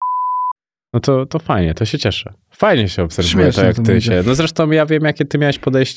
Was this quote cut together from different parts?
no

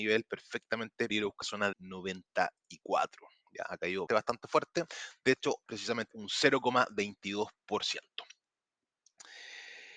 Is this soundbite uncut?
no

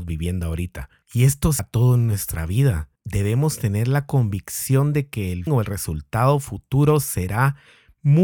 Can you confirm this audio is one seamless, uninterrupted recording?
no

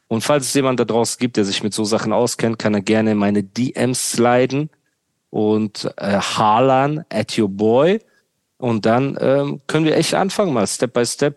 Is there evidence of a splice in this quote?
no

